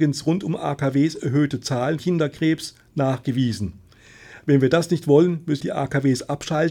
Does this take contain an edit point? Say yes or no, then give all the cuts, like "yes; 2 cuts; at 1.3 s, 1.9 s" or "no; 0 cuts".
yes; 2 cuts; at 2.0 s, 5.6 s